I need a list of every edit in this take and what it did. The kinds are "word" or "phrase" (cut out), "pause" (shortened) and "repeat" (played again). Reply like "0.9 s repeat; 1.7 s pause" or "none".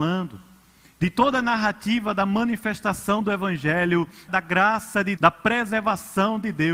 4.3 s word; 5.2 s word